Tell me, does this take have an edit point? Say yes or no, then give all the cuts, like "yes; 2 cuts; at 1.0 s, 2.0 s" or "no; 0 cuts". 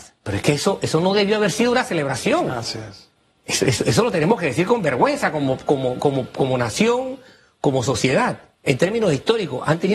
no; 0 cuts